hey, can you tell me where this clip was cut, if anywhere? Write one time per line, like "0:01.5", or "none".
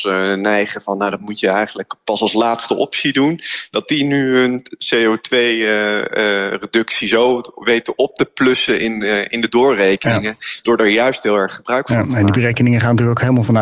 none